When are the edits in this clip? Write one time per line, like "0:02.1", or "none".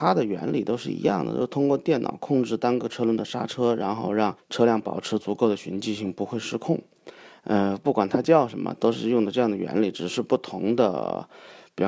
0:04.4